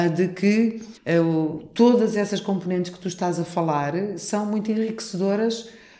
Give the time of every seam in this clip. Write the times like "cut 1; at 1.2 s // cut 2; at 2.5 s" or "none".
cut 1; at 1.0 s

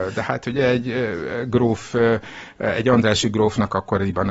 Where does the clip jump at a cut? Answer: none

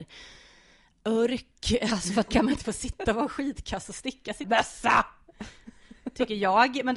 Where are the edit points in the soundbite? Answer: cut 1; at 2.3 s // cut 2; at 2.6 s // cut 3; at 4.4 s

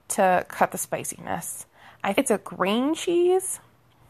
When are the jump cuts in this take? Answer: cut 1; at 2.1 s

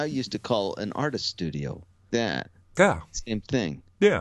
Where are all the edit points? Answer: cut 1; at 2.1 s

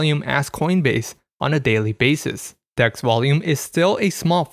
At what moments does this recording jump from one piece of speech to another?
none

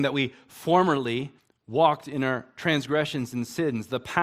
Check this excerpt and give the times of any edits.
cut 1; at 1.4 s

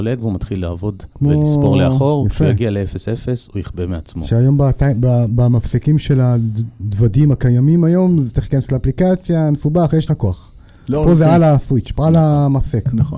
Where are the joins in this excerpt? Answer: cut 1; at 1.1 s // cut 2; at 10.1 s

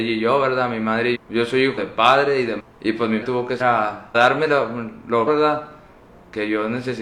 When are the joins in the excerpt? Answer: cut 1; at 1.1 s // cut 2; at 1.8 s // cut 3; at 2.6 s // cut 4; at 3.2 s // cut 5; at 3.6 s // cut 6; at 4.1 s // cut 7; at 5.3 s

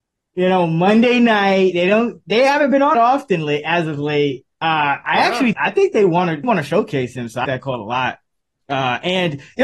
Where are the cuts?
cut 1; at 2.9 s // cut 2; at 4.5 s // cut 3; at 5.5 s // cut 4; at 6.4 s // cut 5; at 7.4 s

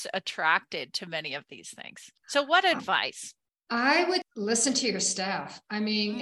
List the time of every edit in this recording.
cut 1; at 2.2 s // cut 2; at 4.2 s

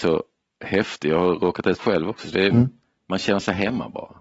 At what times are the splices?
cut 1; at 1.8 s // cut 2; at 2.5 s

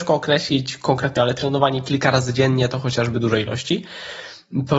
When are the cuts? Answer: cut 1; at 1.1 s

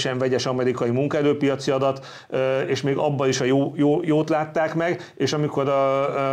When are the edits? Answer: none

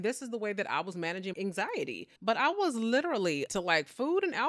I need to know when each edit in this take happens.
cut 1; at 1.3 s // cut 2; at 2.2 s // cut 3; at 2.5 s // cut 4; at 3.5 s

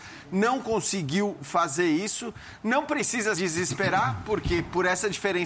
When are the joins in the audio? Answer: cut 1; at 3.3 s

